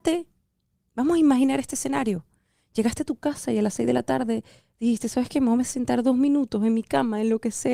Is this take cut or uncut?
uncut